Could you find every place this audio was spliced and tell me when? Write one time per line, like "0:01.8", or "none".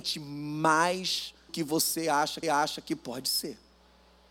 0:01.5
0:02.4